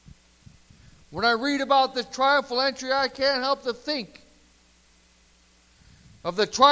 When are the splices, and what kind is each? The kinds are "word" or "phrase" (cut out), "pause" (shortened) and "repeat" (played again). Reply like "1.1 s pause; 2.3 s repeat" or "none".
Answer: none